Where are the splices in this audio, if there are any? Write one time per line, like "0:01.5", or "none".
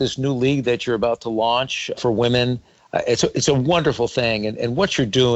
0:02.0